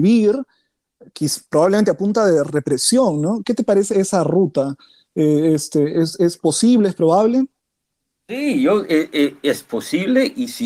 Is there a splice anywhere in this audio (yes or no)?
yes